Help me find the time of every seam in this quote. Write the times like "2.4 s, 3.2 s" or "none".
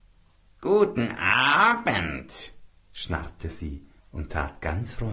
4.0 s